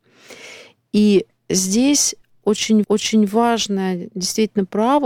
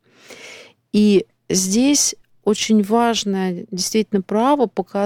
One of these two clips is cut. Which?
first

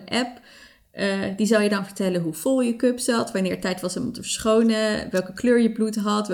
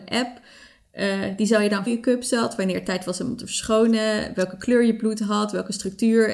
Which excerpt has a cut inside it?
second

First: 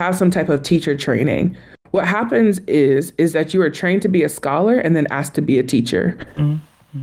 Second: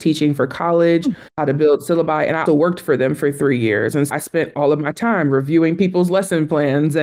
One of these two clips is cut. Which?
second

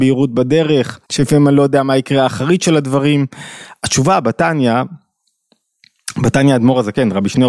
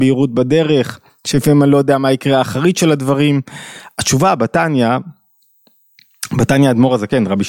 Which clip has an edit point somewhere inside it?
first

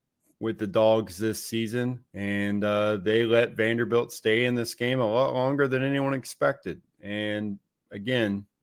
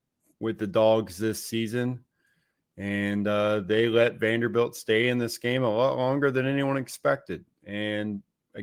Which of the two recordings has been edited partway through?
first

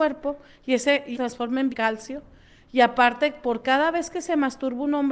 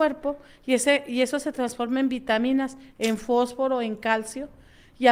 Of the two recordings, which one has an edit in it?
first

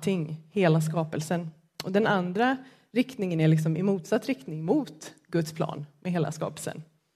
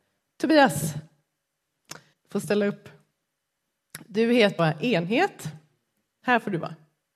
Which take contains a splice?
second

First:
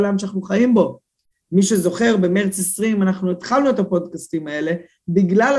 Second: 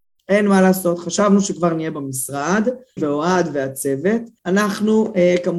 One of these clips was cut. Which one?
second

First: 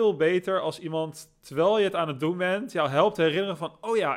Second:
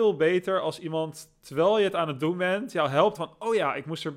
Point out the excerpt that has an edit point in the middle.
second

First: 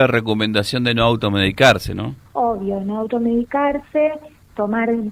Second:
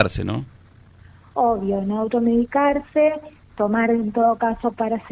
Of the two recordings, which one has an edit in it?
first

